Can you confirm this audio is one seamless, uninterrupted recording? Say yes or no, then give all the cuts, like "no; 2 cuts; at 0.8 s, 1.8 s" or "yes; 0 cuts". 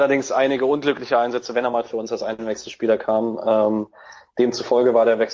yes; 0 cuts